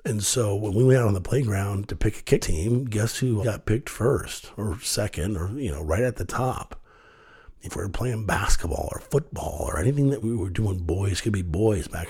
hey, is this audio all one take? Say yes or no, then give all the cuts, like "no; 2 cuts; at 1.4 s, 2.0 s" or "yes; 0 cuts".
no; 4 cuts; at 2.4 s, 3.4 s, 7.6 s, 10.2 s